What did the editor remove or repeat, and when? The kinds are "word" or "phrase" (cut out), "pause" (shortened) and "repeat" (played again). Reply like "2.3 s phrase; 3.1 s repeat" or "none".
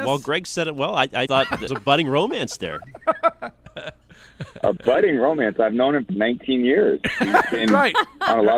1.3 s word; 1.7 s phrase; 6.1 s word